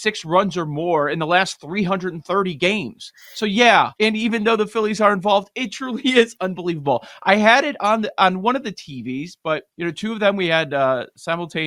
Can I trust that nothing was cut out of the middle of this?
no; 2 cuts; at 3.9 s, 9.7 s

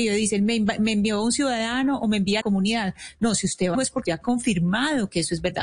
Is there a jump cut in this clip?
yes; 3 cuts; at 2.4 s, 3.7 s, 4.0 s

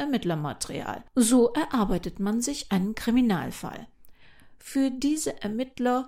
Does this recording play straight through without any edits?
yes; 0 cuts

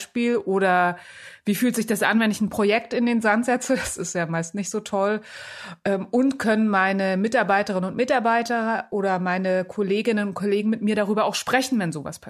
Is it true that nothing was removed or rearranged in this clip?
yes; 0 cuts

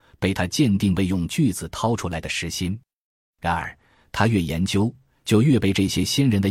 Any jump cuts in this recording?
no; 0 cuts

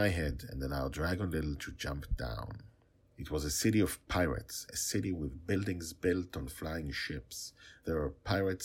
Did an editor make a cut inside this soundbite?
no; 0 cuts

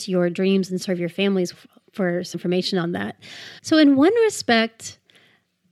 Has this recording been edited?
yes; 3 cuts; at 1.5 s, 2.3 s, 3.6 s

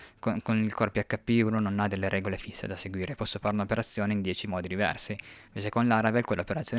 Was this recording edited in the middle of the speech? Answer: no; 0 cuts

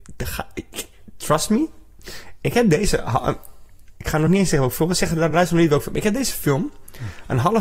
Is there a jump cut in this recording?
no; 0 cuts

